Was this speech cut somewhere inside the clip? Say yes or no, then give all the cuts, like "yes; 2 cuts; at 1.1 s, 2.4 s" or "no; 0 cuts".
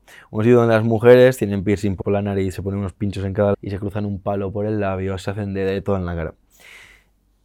yes; 2 cuts; at 2.0 s, 3.5 s